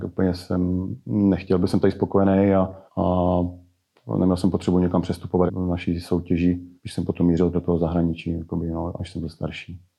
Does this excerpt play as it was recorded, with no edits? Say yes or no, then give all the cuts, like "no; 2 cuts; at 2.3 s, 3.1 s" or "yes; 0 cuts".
no; 4 cuts; at 2.9 s, 5.5 s, 6.8 s, 7.5 s